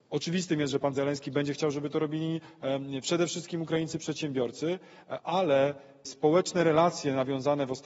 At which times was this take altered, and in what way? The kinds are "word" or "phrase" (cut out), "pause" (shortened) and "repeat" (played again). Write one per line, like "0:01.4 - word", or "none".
0:00.9 - word
0:06.0 - word